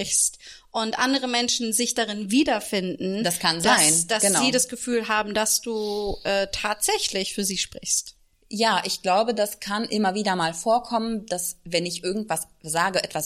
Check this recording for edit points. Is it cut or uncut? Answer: uncut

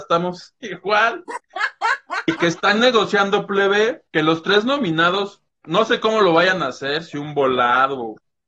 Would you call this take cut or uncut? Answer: cut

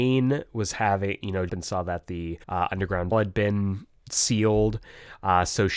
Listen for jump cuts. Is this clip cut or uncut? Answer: cut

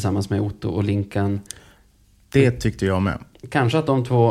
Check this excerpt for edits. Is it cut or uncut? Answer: uncut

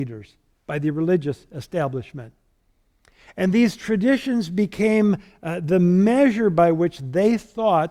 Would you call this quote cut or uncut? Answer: uncut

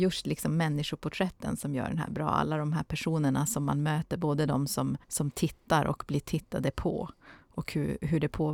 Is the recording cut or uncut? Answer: cut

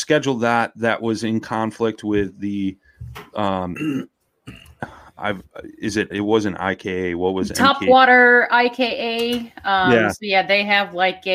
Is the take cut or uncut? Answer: cut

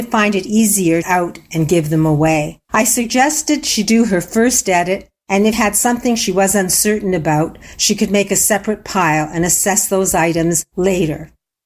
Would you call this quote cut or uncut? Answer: cut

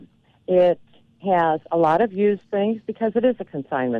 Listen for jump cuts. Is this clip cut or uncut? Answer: uncut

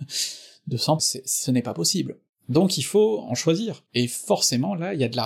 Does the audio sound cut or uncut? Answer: cut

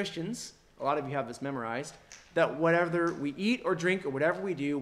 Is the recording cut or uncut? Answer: uncut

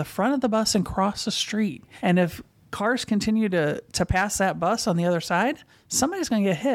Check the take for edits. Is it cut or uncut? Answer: uncut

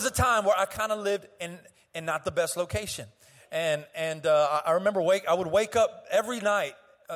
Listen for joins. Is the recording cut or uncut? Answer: uncut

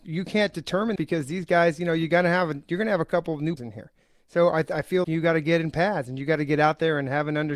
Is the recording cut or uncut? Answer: cut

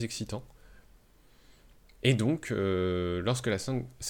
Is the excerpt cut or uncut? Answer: uncut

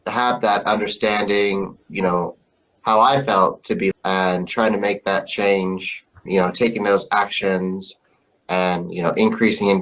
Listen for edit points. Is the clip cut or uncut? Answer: cut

